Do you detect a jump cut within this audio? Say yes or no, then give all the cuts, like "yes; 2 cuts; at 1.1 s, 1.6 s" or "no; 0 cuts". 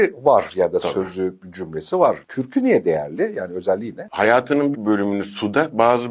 yes; 1 cut; at 4.7 s